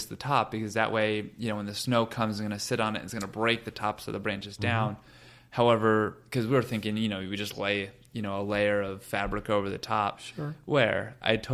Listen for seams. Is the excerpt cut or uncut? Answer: uncut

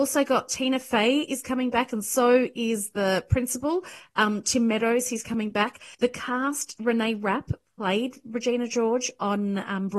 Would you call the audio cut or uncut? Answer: cut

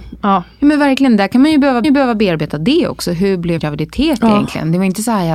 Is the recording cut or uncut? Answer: cut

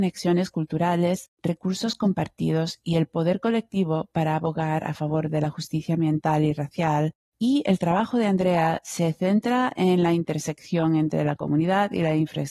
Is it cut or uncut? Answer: uncut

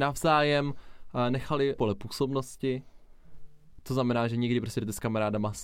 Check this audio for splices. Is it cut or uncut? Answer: cut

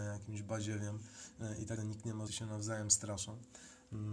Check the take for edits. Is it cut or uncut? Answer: cut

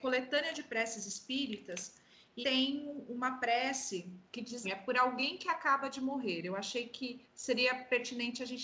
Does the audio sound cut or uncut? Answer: cut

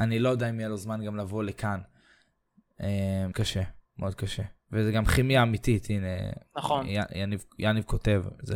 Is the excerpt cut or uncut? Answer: cut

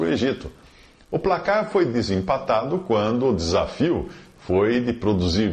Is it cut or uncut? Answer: uncut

